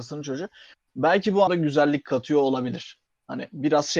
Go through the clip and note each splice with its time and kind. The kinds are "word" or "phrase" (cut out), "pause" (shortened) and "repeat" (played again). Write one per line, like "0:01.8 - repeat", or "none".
0:01.5 - word